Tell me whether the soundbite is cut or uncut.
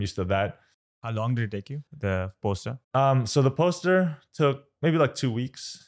cut